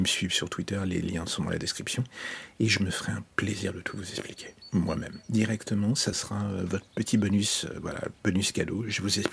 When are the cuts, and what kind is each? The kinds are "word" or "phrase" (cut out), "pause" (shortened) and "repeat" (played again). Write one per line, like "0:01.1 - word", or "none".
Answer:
none